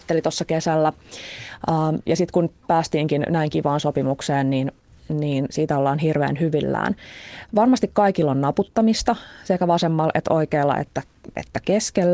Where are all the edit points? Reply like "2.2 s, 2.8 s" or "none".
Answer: none